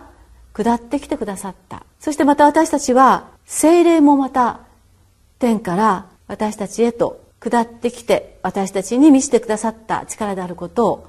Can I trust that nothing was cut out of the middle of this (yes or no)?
no